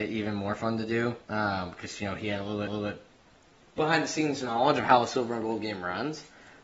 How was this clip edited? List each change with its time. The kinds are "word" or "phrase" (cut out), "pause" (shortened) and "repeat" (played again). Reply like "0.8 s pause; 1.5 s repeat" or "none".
1.2 s pause; 2.7 s repeat